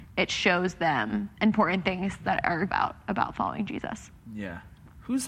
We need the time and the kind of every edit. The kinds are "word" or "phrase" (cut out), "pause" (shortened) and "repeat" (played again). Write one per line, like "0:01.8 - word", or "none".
0:01.3 - pause
0:02.7 - phrase